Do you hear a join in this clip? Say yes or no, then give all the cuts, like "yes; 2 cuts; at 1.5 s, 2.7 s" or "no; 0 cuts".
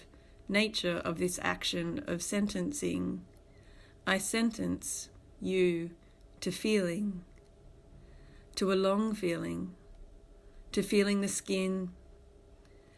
no; 0 cuts